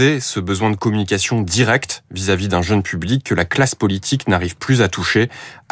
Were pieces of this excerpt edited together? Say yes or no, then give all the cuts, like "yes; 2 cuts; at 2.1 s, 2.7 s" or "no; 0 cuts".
no; 0 cuts